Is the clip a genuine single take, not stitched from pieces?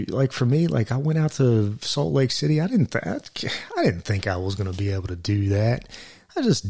yes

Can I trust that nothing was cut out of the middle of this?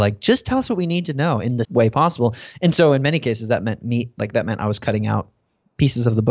no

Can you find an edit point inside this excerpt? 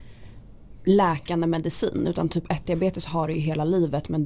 no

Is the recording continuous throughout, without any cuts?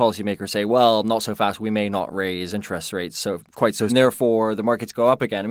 no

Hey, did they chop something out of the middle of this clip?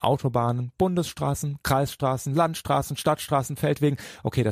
no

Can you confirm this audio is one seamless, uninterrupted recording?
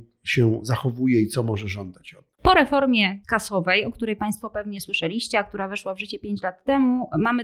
no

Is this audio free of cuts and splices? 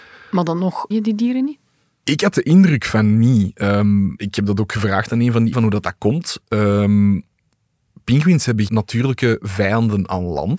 no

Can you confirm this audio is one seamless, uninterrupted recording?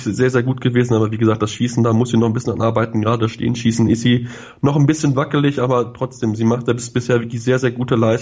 yes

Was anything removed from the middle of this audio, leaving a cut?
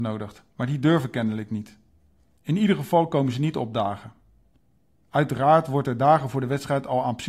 no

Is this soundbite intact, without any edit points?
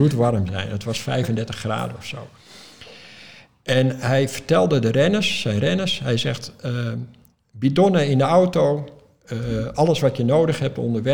yes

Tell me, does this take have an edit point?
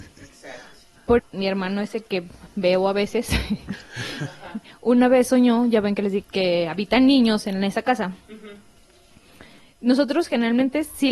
yes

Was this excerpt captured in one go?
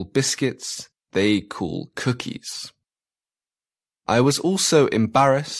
yes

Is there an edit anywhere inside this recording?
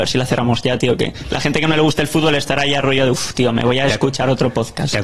no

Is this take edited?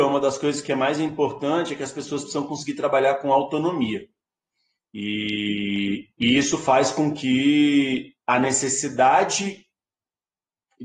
yes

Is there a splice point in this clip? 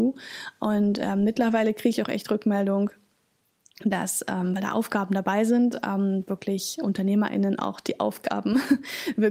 no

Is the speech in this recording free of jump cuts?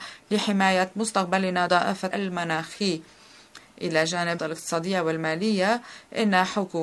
no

